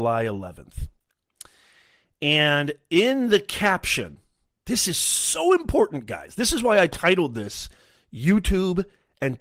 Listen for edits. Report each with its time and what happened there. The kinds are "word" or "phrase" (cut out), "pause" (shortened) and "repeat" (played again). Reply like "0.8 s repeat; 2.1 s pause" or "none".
none